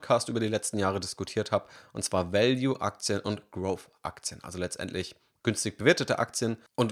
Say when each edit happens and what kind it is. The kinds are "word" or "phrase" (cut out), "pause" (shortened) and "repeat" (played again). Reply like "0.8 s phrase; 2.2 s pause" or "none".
none